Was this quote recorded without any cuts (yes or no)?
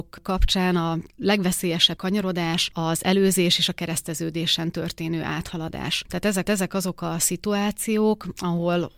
no